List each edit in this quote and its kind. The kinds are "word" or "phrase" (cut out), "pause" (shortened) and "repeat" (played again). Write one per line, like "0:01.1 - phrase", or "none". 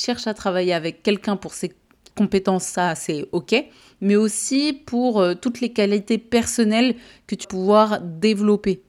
0:07.4 - word